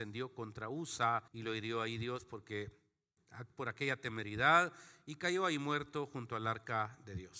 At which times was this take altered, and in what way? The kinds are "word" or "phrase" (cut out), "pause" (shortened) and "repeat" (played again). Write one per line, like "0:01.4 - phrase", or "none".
0:01.3 - pause